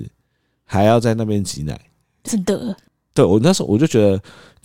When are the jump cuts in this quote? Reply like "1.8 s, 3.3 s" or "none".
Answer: 2.3 s